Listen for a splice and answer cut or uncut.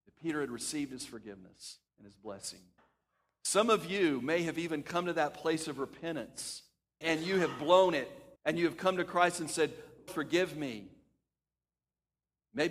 cut